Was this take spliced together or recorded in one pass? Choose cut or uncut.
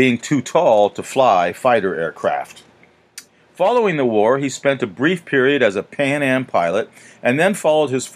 uncut